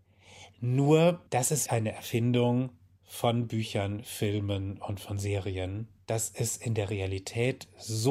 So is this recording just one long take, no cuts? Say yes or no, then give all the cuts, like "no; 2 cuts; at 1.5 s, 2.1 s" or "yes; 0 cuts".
no; 2 cuts; at 1.3 s, 1.7 s